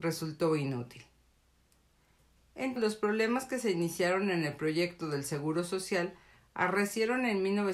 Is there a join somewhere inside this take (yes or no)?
yes